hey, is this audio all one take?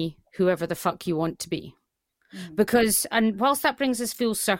yes; 0 cuts

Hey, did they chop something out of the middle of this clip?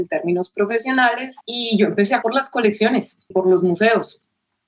yes; 3 cuts; at 1.4 s, 2.2 s, 3.3 s

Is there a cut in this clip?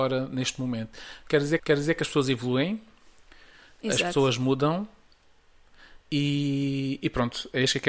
yes; 2 cuts; at 1.6 s, 6.0 s

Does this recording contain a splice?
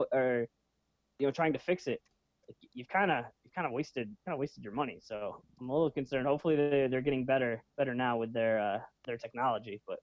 yes; 4 cuts; at 3.3 s, 4.2 s, 7.7 s, 9.0 s

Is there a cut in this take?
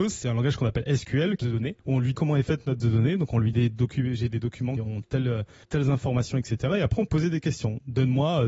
yes; 8 cuts; at 1.4 s, 1.8 s, 2.1 s, 2.8 s, 3.5 s, 4.8 s, 5.6 s, 7.1 s

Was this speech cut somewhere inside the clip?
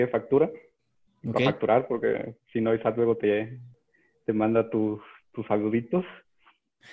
no; 0 cuts

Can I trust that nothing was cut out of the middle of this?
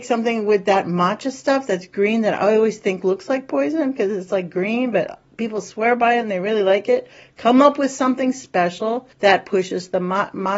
no; 1 cut; at 9.1 s

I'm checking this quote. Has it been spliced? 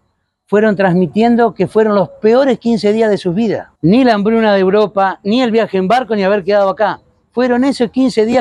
yes; 1 cut; at 3.8 s

